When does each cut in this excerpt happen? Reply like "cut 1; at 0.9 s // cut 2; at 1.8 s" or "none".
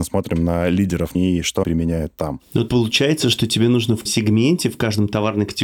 cut 1; at 1.1 s // cut 2; at 1.6 s // cut 3; at 2.7 s // cut 4; at 4.1 s